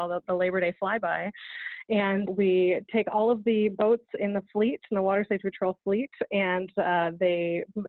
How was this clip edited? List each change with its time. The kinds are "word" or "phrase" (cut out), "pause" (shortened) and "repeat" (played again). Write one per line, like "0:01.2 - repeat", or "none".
0:02.3 - word